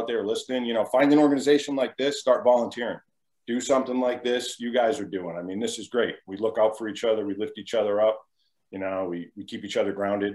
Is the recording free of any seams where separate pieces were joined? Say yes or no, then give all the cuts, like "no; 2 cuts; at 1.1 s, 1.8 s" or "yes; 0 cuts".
yes; 0 cuts